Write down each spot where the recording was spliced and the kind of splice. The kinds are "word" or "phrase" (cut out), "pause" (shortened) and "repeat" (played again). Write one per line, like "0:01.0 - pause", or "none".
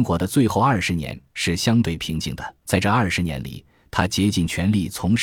0:02.6 - pause

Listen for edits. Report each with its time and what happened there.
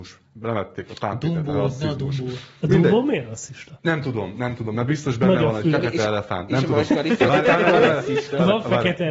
none

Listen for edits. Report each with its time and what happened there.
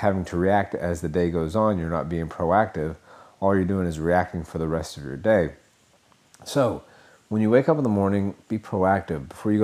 none

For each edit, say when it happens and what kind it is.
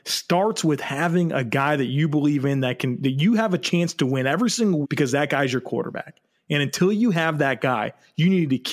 0:04.8 - word

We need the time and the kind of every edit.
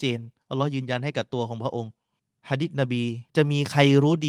0:02.2 - pause
0:03.3 - pause

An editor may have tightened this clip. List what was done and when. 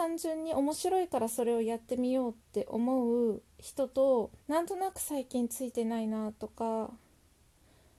0:02.4 - pause
0:04.4 - pause

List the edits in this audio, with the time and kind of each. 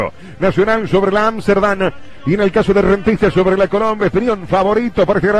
none

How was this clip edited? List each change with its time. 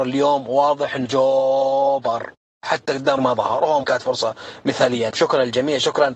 0:01.1 - word
0:03.2 - word
0:03.8 - word
0:05.1 - word

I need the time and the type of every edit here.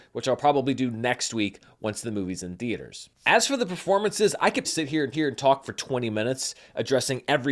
0:04.6 - word
0:05.1 - repeat

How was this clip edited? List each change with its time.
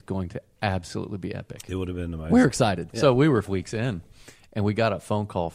0:03.5 - word

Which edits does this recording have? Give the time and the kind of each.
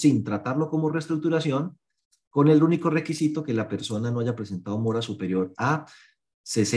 none

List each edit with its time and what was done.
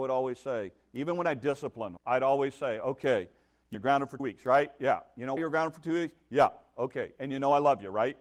0:02.0 - word
0:03.7 - word
0:04.2 - word
0:05.4 - word

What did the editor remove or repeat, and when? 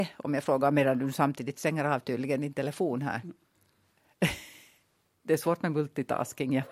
none

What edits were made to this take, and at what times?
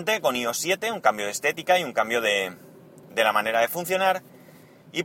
none

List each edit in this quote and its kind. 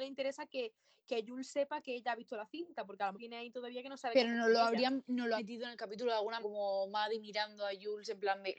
0:03.2 - phrase
0:05.4 - word
0:06.4 - word

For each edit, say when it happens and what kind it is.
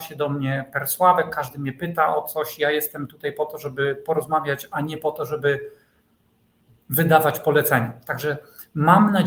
none

